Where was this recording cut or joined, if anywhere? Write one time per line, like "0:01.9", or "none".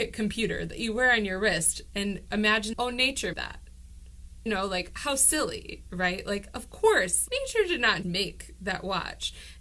0:02.7
0:03.3
0:04.5
0:07.3
0:08.0